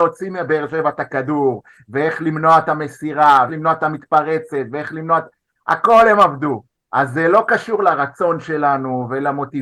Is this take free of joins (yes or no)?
no